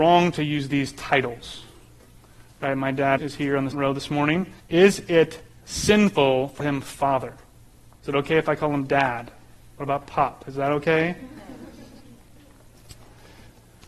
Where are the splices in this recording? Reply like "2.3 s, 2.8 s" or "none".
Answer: 3.2 s, 3.7 s, 4.6 s, 6.6 s